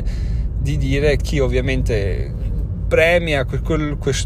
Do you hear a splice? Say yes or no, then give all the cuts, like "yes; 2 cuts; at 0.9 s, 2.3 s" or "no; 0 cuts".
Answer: yes; 1 cut; at 1.2 s